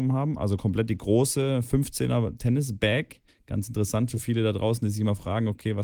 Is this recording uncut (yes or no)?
no